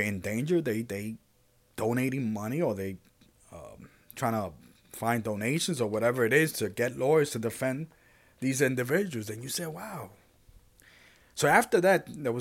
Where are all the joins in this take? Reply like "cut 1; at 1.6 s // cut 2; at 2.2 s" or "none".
none